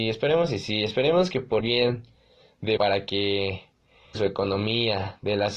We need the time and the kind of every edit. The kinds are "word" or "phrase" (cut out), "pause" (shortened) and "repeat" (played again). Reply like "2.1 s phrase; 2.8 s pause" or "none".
1.6 s word; 2.8 s word; 4.1 s word